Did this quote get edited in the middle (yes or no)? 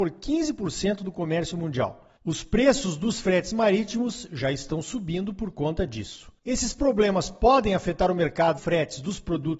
yes